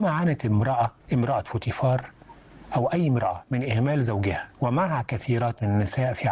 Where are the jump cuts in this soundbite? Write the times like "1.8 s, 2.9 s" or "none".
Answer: 1.0 s

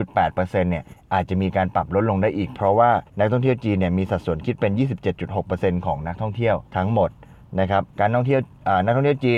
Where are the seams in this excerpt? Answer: 3.1 s, 6.7 s, 7.9 s

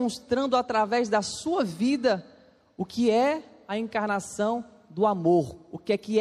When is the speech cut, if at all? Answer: none

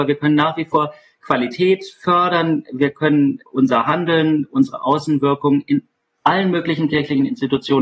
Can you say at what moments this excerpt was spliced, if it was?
3.4 s

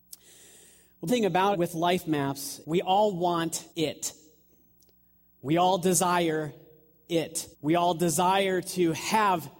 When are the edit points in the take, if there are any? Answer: 1.1 s, 1.5 s, 2.6 s, 3.7 s, 7.5 s

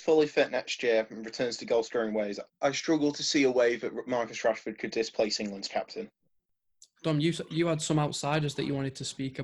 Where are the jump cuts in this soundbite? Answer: none

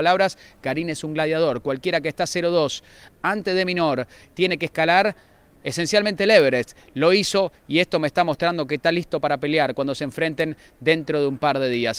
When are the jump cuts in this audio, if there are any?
none

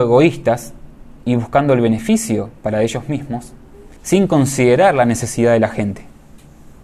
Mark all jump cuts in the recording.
4.0 s

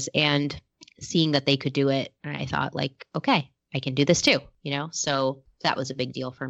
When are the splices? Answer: 2.2 s

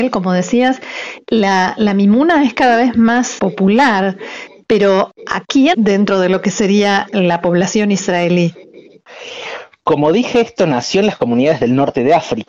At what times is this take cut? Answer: 3.4 s, 5.7 s

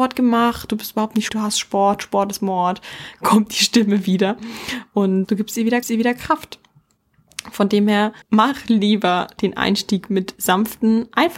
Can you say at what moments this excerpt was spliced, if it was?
1.3 s, 5.2 s, 5.8 s, 8.2 s

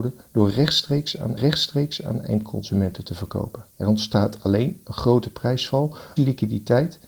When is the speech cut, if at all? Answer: 1.4 s, 3.7 s, 6.2 s

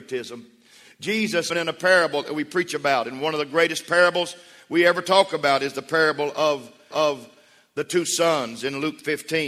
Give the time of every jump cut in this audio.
1.5 s, 6.9 s

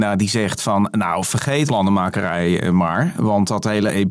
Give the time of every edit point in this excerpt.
1.7 s

